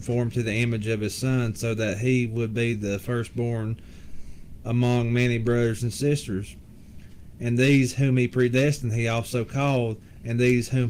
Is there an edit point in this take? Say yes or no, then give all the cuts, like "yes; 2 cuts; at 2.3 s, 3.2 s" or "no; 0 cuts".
no; 0 cuts